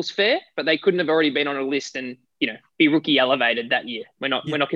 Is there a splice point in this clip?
no; 0 cuts

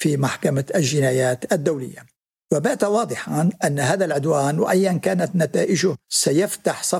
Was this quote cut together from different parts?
yes; 2 cuts; at 2.2 s, 6.0 s

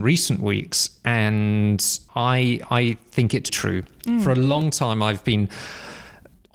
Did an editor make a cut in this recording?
yes; 2 cuts; at 2.1 s, 3.5 s

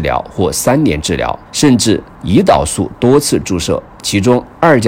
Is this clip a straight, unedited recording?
no; 2 cuts; at 1.4 s, 2.1 s

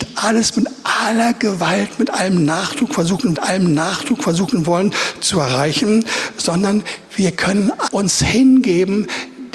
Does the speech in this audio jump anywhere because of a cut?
yes; 2 cuts; at 3.4 s, 7.9 s

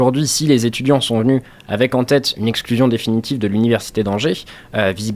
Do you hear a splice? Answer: no; 0 cuts

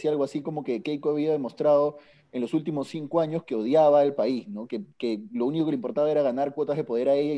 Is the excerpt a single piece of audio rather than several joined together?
yes; 0 cuts

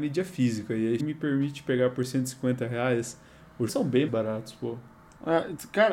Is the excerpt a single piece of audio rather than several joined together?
no; 3 cuts; at 1.0 s, 3.7 s, 4.1 s

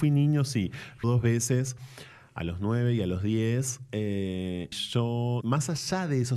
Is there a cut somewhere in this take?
yes; 3 cuts; at 1.0 s, 4.7 s, 5.4 s

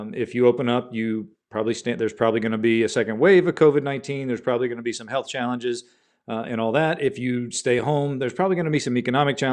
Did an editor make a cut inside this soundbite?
no; 0 cuts

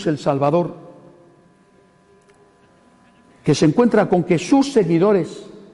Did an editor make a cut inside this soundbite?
no; 0 cuts

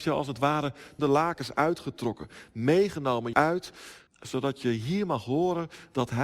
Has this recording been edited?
yes; 3 cuts; at 1.0 s, 3.3 s, 4.1 s

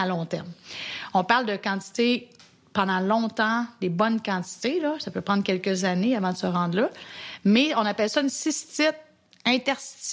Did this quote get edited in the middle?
no; 0 cuts

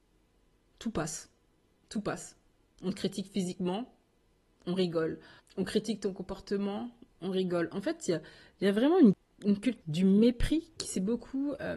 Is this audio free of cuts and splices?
yes; 0 cuts

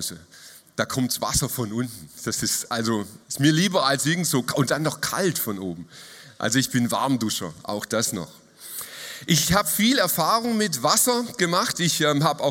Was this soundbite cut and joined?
yes; 1 cut; at 3.2 s

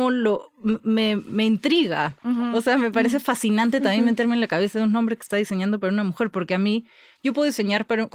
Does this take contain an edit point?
no; 0 cuts

